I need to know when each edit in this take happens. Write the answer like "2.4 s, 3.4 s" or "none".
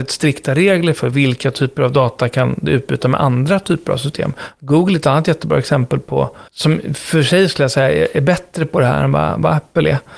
6.5 s